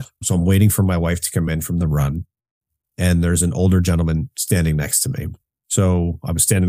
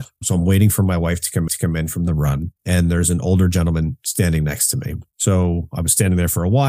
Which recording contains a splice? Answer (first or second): second